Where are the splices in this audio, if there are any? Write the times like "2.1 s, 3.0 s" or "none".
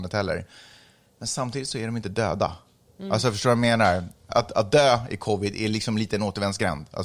2.9 s